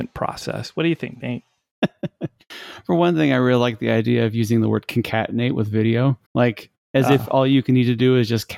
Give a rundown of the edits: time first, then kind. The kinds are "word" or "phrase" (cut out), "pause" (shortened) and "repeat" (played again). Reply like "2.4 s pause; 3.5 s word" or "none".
6.2 s pause

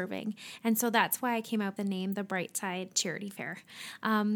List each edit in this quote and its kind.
1.8 s word

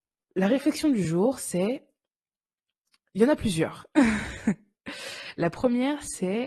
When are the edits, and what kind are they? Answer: none

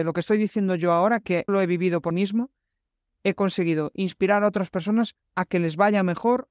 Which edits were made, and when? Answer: 1.5 s word; 2.1 s word

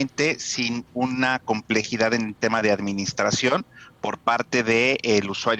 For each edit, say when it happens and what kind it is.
none

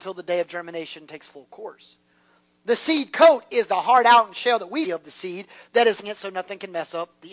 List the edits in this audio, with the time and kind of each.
4.8 s word; 6.0 s word

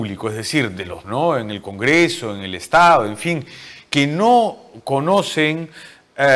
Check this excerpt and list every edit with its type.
1.0 s word

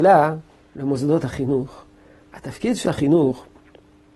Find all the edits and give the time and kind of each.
2.8 s word

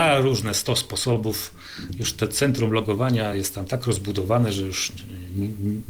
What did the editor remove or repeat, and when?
none

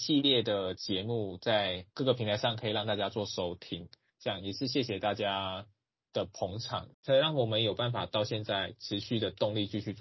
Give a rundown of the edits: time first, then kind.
none

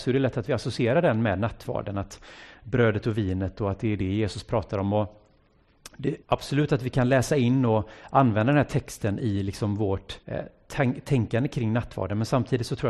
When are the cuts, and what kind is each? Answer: 6.2 s pause; 10.2 s pause

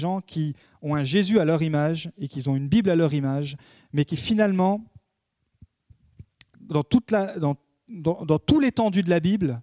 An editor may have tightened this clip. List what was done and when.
none

